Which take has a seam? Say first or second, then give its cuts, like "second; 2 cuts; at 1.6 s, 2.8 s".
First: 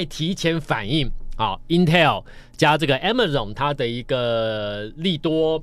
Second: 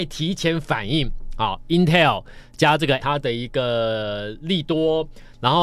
second; 1 cut; at 3.0 s